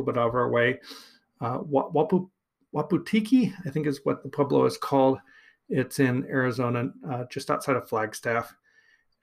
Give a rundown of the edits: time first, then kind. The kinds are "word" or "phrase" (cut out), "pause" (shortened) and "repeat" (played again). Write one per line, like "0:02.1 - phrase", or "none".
0:04.2 - word

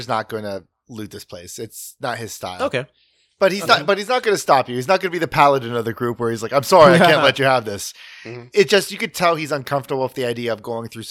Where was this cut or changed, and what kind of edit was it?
none

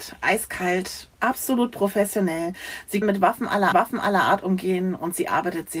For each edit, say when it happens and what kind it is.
0:01.1 - pause
0:03.0 - word
0:03.7 - repeat

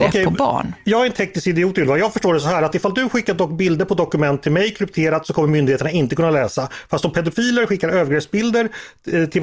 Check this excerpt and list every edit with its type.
none

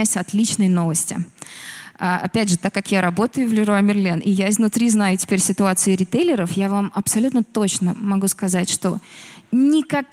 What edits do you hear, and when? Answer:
none

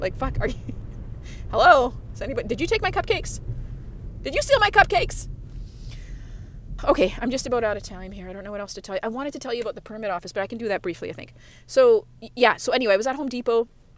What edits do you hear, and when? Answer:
0:06.8 - word

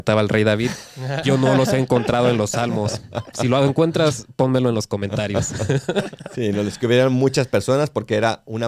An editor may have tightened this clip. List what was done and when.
0:01.2 - word

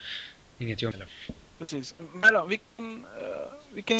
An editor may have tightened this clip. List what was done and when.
0:00.9 - word

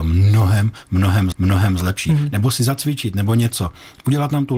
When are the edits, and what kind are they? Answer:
0:01.3 - repeat

